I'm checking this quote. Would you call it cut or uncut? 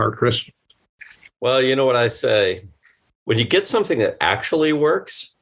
uncut